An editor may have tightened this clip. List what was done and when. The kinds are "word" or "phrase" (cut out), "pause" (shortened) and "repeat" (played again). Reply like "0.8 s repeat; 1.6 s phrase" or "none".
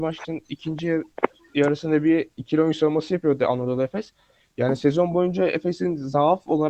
none